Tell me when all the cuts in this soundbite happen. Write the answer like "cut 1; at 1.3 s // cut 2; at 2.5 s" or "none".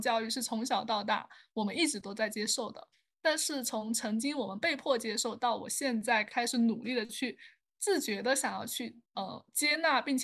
cut 1; at 9.1 s